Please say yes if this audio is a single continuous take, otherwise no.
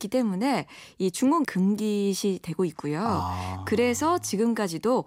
no